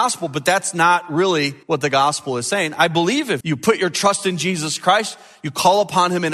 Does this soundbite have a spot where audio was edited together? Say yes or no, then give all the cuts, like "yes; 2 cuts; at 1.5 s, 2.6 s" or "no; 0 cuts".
yes; 2 cuts; at 1.6 s, 3.4 s